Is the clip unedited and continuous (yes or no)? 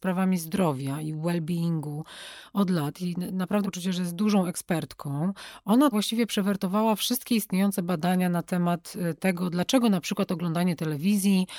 no